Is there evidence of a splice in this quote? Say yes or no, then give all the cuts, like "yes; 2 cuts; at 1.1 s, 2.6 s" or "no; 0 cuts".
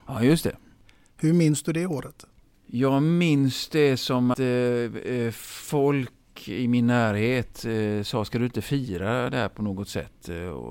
yes; 1 cut; at 4.3 s